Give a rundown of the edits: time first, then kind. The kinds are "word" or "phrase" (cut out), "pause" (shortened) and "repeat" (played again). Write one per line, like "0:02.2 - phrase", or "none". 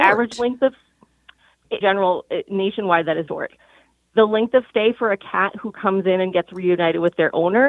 0:01.8 - phrase
0:03.3 - word